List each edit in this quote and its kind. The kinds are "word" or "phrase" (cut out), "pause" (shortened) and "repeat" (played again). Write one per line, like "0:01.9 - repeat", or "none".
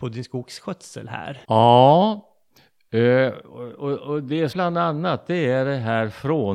0:01.4 - pause
0:04.5 - phrase